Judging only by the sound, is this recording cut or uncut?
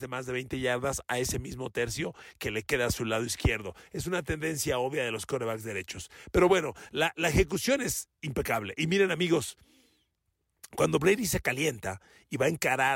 uncut